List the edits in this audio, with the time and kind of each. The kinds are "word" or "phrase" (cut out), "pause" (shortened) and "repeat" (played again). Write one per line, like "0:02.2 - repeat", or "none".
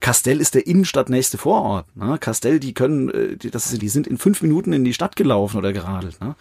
0:03.8 - word